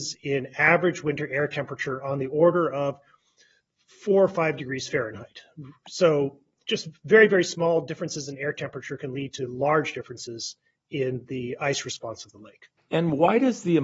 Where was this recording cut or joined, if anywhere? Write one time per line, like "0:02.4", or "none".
none

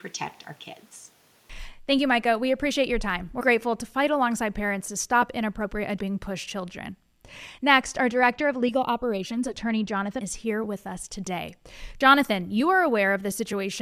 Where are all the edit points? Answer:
0:03.4
0:06.0
0:06.5
0:10.2

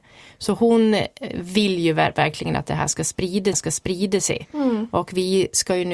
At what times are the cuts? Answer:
0:03.5

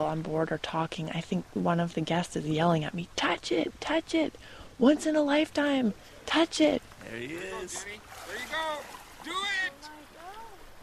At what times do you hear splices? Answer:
none

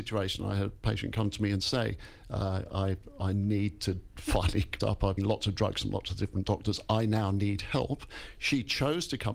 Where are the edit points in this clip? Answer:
0:04.8
0:05.2

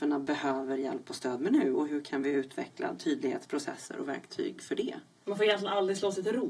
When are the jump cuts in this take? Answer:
none

